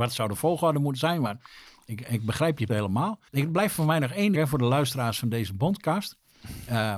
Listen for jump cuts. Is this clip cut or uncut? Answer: cut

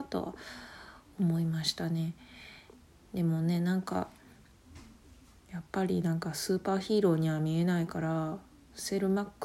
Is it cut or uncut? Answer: uncut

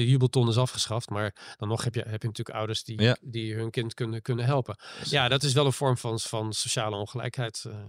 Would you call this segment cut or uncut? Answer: uncut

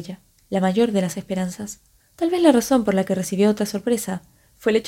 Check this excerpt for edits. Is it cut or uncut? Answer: cut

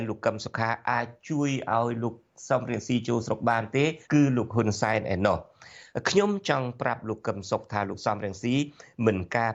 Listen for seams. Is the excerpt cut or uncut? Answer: cut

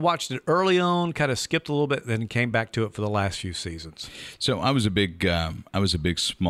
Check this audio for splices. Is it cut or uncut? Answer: uncut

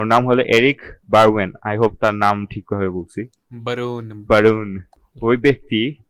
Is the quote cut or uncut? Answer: cut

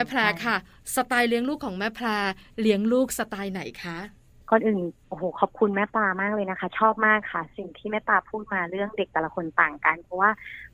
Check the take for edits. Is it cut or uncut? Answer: uncut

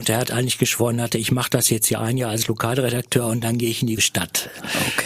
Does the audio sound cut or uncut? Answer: cut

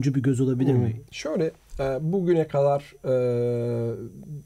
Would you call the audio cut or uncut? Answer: uncut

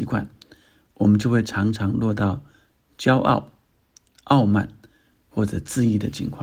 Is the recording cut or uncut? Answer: uncut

